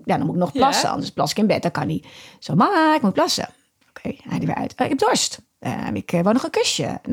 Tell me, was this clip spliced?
no; 0 cuts

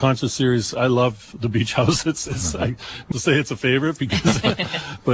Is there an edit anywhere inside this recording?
yes; 1 cut; at 3.1 s

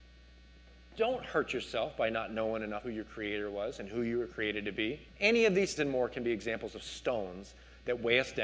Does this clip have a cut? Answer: yes; 3 cuts; at 2.8 s, 5.1 s, 5.8 s

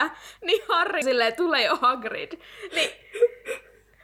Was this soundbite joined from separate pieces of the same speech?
yes; 1 cut; at 1.0 s

